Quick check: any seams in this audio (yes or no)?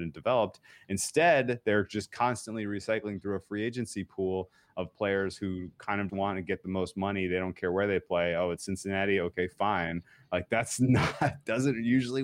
yes